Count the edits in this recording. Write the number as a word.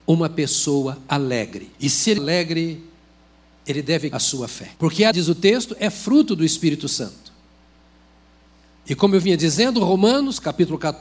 five